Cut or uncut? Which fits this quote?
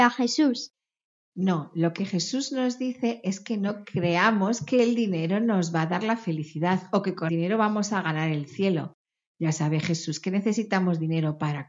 cut